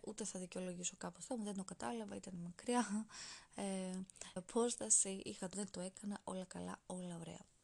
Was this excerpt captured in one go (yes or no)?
no